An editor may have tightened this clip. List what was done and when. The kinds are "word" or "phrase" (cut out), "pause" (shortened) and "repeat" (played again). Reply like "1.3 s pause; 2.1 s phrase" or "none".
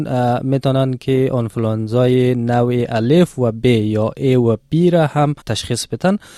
5.4 s pause